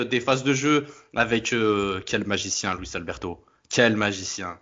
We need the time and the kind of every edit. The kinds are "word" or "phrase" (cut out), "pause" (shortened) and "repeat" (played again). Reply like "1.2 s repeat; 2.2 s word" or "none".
none